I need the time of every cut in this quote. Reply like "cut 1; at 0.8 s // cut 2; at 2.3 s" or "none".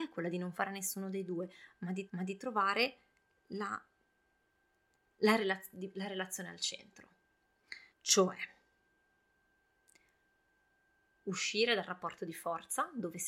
cut 1; at 2.1 s // cut 2; at 7.9 s